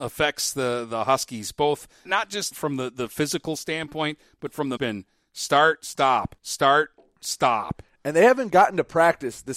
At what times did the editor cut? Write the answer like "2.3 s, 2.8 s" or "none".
2.1 s, 2.5 s, 4.8 s, 6.4 s